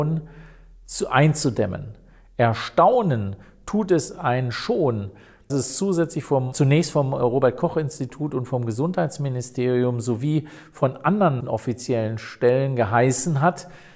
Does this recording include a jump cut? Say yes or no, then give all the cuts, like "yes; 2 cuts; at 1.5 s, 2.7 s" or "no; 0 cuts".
yes; 3 cuts; at 5.5 s, 6.5 s, 11.4 s